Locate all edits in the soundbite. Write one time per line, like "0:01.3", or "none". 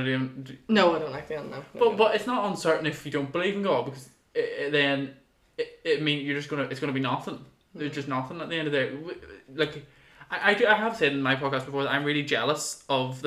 none